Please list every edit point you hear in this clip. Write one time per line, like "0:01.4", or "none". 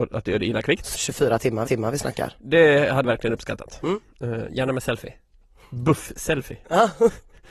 0:00.9
0:01.7
0:03.0